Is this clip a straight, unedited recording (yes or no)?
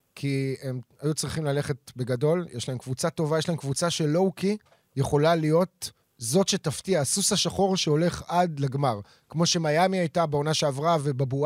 no